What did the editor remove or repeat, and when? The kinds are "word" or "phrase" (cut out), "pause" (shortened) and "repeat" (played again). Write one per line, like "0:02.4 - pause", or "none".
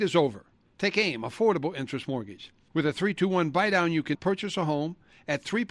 0:04.1 - word